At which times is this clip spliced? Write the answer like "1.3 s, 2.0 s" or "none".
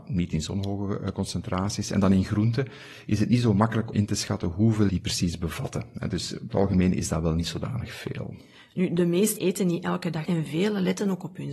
3.9 s, 4.9 s, 6.5 s, 9.4 s, 10.2 s